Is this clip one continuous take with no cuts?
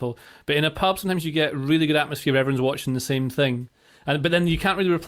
yes; 0 cuts

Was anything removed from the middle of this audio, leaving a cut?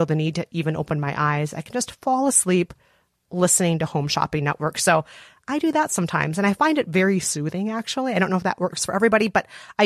no; 0 cuts

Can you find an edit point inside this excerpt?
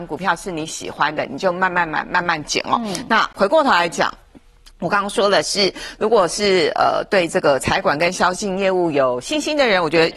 no; 0 cuts

